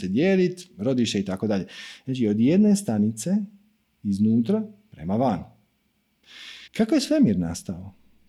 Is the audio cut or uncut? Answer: cut